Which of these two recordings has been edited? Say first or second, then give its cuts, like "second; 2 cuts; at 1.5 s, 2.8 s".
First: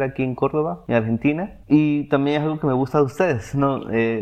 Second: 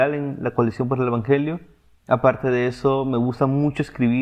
first; 1 cut; at 1.6 s